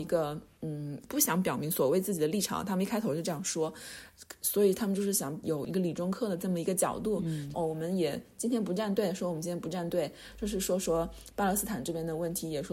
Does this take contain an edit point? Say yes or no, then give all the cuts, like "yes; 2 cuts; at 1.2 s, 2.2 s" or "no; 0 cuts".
yes; 2 cuts; at 5.4 s, 7.5 s